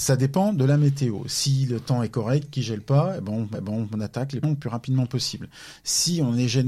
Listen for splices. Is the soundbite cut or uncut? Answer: cut